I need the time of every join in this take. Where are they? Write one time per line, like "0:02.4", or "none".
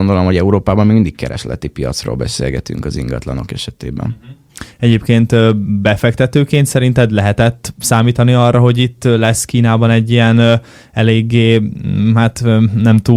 none